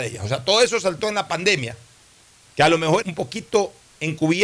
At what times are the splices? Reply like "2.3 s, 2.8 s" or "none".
3.0 s